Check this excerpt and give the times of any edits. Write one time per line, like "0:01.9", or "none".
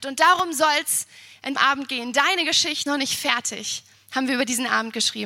0:01.5
0:02.9